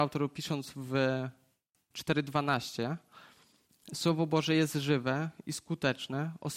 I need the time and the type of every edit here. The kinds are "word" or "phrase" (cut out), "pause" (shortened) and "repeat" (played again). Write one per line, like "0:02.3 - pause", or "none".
none